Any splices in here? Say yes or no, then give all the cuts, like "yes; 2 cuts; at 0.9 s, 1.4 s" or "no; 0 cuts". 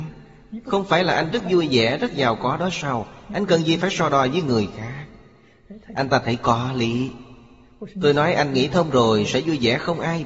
no; 0 cuts